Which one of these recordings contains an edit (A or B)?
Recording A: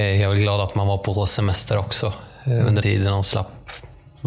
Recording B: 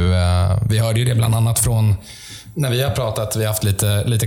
A